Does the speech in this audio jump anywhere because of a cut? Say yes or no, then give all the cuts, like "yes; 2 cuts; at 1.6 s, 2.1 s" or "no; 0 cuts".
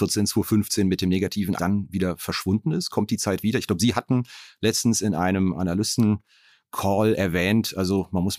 yes; 1 cut; at 1.6 s